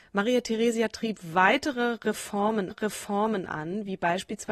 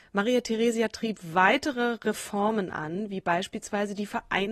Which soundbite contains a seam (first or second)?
first